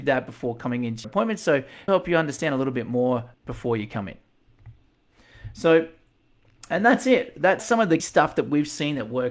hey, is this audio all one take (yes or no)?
no